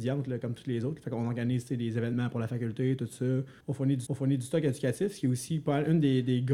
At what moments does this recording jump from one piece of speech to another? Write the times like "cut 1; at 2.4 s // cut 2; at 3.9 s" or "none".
cut 1; at 3.6 s // cut 2; at 4.1 s